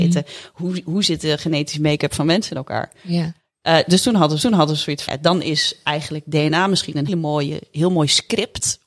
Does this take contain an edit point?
yes; 3 cuts; at 4.4 s, 5.1 s, 7.1 s

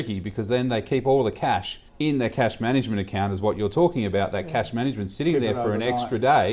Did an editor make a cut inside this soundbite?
yes; 1 cut; at 1.9 s

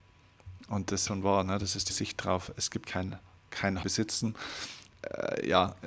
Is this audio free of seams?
no; 4 cuts; at 1.1 s, 1.9 s, 2.8 s, 3.8 s

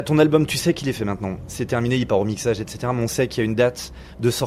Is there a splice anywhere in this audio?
no; 0 cuts

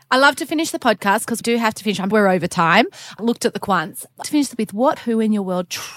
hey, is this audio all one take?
no; 7 cuts; at 1.4 s, 2.1 s, 3.2 s, 3.6 s, 4.2 s, 4.6 s, 5.0 s

